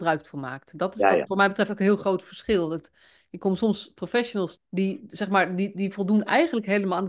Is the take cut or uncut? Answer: cut